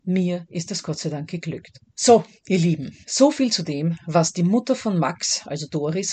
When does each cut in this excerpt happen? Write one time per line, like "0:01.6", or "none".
0:01.9
0:03.0